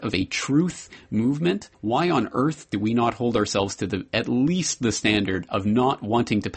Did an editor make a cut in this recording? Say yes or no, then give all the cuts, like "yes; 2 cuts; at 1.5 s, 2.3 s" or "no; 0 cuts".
yes; 1 cut; at 1.7 s